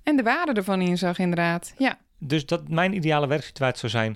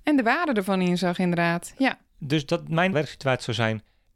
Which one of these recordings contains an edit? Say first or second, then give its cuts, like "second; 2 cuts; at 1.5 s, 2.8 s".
second; 1 cut; at 2.9 s